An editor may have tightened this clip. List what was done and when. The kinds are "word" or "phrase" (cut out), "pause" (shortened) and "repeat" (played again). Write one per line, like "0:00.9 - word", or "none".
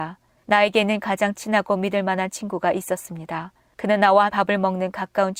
0:04.3 - word